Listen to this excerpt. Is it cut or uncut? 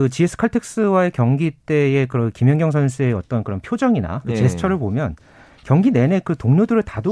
uncut